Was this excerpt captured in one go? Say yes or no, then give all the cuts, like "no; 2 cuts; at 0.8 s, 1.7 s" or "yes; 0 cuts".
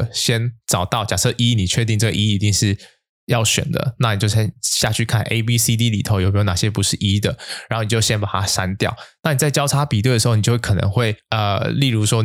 yes; 0 cuts